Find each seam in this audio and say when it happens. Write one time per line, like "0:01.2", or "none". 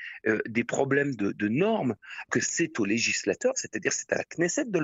0:02.3